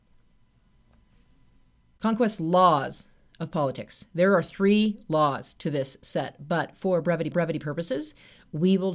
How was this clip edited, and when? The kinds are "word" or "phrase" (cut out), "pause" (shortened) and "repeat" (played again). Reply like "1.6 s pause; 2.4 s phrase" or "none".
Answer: 7.3 s repeat